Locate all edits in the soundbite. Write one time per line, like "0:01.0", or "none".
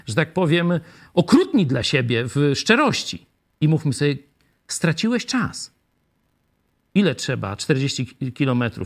none